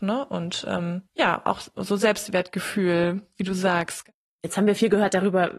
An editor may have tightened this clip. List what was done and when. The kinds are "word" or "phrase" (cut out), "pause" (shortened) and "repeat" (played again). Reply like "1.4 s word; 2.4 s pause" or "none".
1.1 s pause; 4.2 s pause